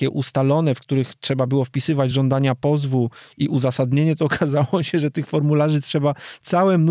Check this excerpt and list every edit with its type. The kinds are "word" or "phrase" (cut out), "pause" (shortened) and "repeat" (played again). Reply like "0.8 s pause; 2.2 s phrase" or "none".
none